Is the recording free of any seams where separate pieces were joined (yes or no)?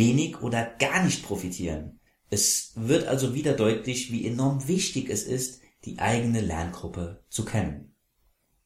no